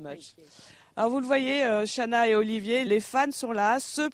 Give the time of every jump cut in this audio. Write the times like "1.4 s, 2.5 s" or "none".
2.9 s